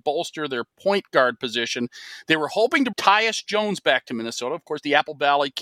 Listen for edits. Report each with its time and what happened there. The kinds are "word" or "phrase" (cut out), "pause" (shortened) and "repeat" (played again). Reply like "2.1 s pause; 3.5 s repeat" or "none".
2.9 s word